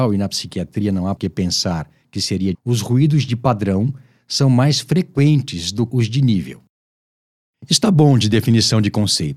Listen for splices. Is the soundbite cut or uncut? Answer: cut